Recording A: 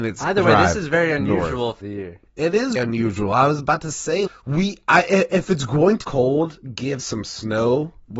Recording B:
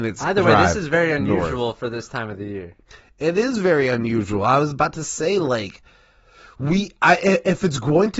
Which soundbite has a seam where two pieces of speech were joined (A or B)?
A